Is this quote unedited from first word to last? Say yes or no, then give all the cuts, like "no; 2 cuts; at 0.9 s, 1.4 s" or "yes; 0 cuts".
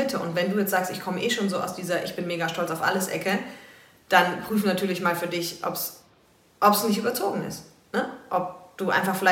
yes; 0 cuts